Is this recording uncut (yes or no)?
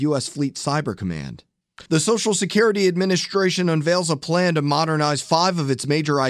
no